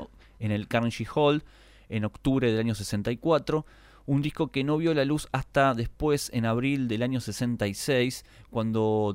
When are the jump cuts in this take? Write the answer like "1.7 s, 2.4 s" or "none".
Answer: none